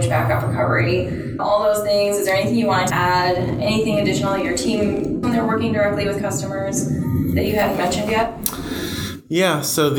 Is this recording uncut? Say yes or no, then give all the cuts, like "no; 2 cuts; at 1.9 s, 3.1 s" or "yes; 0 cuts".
no; 3 cuts; at 1.4 s, 2.9 s, 5.2 s